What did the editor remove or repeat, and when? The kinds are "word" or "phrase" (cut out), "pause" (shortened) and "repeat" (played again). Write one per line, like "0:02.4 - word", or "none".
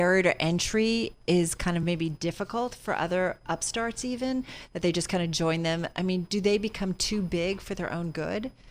none